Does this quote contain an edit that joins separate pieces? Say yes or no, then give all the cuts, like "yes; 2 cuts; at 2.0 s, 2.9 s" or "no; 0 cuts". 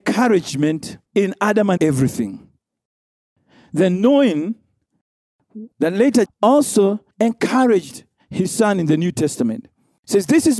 yes; 5 cuts; at 1.1 s, 1.8 s, 5.7 s, 6.3 s, 7.1 s